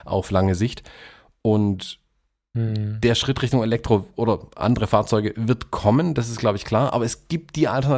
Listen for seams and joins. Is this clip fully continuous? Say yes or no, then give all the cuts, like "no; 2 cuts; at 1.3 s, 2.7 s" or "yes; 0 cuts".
yes; 0 cuts